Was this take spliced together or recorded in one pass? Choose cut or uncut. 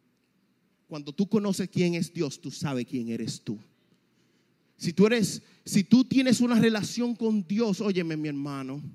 uncut